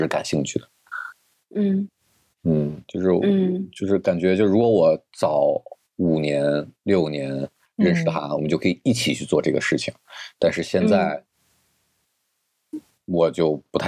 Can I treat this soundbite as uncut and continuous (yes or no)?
yes